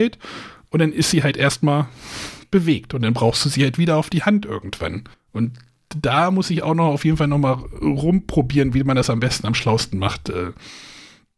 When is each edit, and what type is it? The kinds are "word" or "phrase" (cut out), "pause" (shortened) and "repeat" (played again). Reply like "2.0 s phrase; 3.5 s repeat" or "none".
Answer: 5.1 s pause